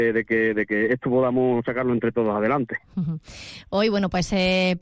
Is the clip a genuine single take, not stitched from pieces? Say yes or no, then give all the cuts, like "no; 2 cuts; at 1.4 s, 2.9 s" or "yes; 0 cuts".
yes; 0 cuts